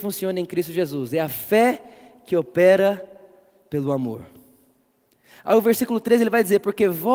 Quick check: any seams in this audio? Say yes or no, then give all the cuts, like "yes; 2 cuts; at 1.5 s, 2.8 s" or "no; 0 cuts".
no; 0 cuts